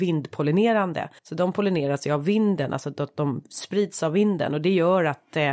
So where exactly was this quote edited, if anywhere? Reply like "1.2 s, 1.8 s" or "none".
1.2 s